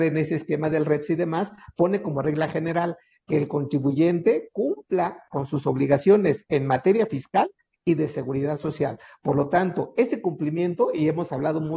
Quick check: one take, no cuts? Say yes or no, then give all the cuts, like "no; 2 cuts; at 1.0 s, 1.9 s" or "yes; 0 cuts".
yes; 0 cuts